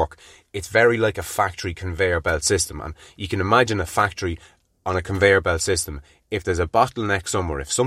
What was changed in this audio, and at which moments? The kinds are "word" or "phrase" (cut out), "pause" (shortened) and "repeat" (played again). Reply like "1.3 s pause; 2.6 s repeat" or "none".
none